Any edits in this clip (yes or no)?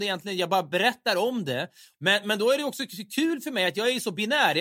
no